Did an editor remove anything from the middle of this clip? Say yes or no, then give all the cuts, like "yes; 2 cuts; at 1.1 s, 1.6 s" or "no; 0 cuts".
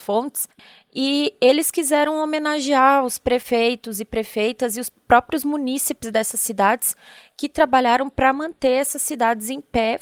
no; 0 cuts